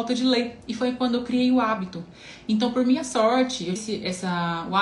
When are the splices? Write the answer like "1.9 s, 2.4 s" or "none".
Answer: 3.8 s